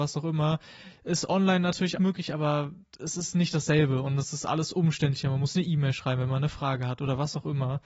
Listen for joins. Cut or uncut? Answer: cut